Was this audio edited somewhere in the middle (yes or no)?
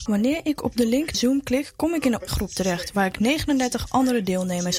yes